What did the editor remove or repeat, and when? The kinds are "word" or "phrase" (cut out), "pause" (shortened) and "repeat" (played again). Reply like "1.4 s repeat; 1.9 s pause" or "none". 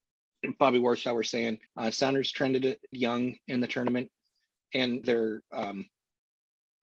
1.7 s pause; 2.9 s word; 5.0 s phrase